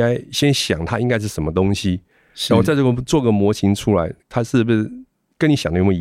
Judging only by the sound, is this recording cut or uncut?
cut